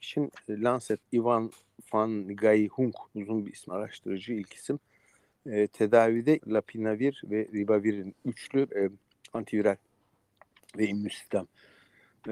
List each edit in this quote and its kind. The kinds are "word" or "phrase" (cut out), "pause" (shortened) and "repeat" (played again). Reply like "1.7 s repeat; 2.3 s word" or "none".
1.0 s word; 3.1 s pause; 3.7 s word; 6.4 s word; 8.7 s word